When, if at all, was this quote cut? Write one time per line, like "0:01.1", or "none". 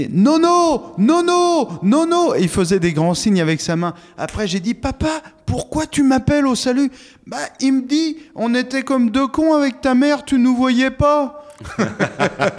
none